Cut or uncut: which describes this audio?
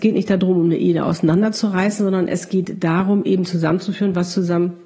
uncut